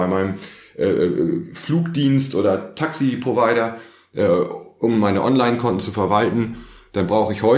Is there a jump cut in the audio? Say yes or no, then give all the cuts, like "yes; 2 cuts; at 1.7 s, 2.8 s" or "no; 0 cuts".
no; 0 cuts